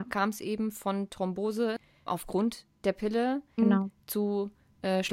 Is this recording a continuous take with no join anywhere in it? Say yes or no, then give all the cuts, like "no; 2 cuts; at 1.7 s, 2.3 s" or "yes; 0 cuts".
no; 2 cuts; at 2.1 s, 3.6 s